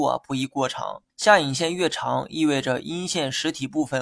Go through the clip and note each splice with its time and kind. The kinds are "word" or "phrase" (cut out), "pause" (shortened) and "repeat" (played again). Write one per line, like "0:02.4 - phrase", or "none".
0:01.1 - pause